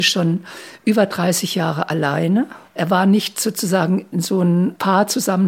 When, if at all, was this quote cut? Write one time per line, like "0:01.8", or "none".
0:02.7
0:04.1